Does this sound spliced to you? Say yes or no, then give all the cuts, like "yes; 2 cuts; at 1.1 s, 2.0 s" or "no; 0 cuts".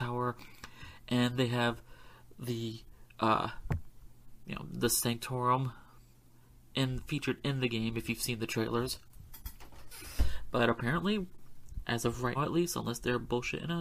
yes; 1 cut; at 12.3 s